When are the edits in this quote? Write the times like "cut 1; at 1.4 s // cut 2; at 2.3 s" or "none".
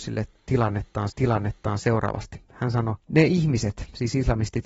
cut 1; at 1.1 s // cut 2; at 3.0 s